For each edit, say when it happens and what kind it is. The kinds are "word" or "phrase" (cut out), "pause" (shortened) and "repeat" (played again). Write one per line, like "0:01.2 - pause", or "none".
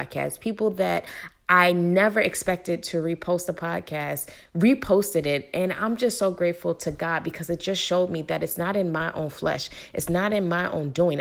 none